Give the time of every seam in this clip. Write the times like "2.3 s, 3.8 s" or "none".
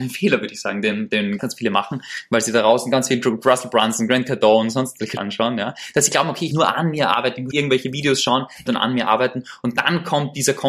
1.4 s, 5.2 s, 6.5 s, 7.5 s, 8.7 s